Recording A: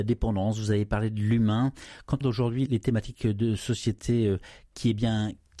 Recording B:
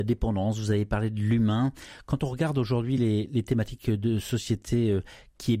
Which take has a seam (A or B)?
A